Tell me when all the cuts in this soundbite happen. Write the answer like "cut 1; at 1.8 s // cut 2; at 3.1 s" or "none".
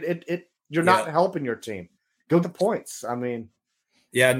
cut 1; at 2.4 s